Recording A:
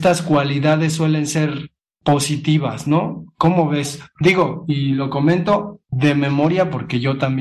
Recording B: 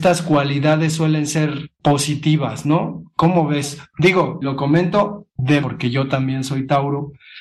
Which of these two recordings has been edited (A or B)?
B